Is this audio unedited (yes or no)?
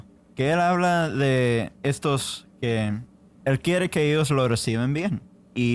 yes